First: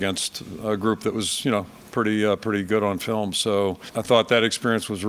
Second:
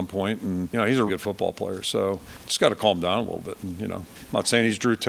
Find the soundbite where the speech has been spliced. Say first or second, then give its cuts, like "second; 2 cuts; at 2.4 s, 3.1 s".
second; 1 cut; at 1.1 s